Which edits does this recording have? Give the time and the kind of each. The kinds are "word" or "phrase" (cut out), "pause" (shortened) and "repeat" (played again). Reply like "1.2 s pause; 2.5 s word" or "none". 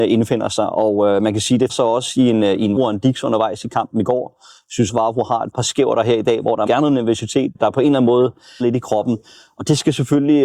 1.7 s word; 2.8 s word; 4.9 s word; 5.5 s word; 6.7 s word; 7.5 s word; 8.6 s word